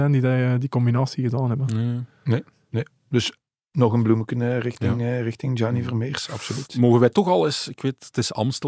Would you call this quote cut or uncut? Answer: uncut